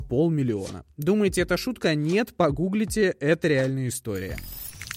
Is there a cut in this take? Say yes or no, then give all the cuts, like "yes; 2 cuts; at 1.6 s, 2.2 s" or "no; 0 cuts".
no; 0 cuts